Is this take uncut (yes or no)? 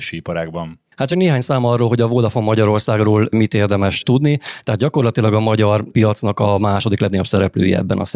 yes